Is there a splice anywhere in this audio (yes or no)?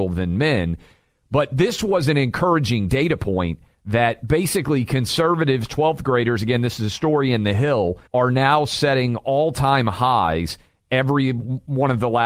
yes